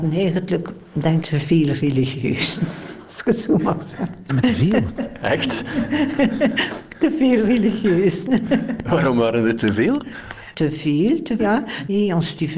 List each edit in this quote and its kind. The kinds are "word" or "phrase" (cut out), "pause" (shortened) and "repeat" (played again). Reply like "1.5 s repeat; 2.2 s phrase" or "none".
1.2 s word; 4.3 s word; 9.6 s word; 11.4 s word